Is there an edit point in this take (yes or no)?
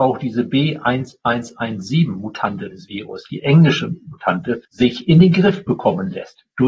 yes